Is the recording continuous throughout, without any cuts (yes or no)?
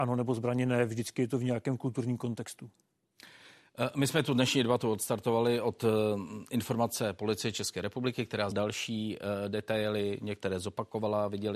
no